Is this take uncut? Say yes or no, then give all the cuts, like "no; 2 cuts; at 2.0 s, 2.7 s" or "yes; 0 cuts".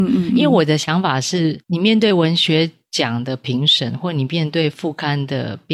yes; 0 cuts